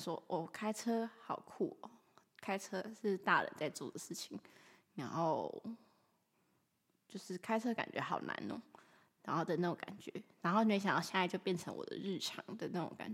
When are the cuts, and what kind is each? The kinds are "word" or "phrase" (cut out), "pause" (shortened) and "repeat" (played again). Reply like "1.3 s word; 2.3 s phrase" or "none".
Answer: none